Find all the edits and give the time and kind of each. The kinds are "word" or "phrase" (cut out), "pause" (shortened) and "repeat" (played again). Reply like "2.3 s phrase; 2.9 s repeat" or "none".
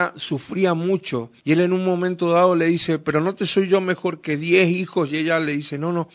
1.4 s pause